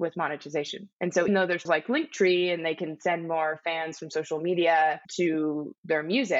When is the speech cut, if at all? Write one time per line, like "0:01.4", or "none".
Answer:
0:00.9
0:01.3
0:01.6
0:05.0